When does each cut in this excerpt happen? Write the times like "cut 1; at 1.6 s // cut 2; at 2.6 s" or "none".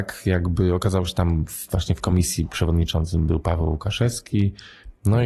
none